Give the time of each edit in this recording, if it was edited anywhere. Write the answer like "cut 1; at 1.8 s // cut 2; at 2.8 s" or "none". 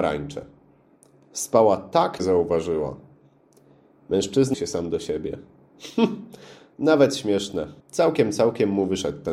cut 1; at 2.2 s // cut 2; at 4.5 s // cut 3; at 6.7 s // cut 4; at 7.8 s